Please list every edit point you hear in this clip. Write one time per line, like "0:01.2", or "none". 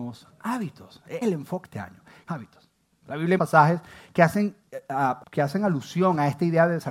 0:01.2
0:01.6
0:02.3
0:03.4
0:04.6
0:05.2